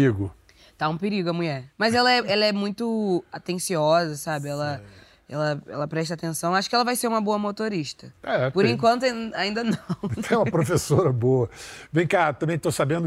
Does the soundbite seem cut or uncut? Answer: uncut